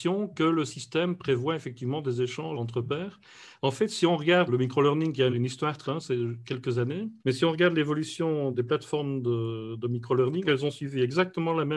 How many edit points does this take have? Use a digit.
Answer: 7